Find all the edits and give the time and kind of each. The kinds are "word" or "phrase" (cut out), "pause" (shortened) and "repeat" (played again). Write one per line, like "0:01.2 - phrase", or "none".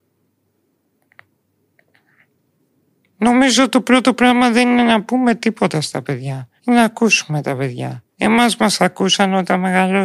0:06.6 - pause
0:08.1 - pause